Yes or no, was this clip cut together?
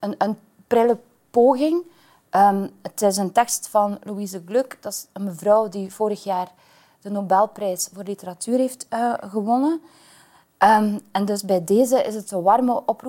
no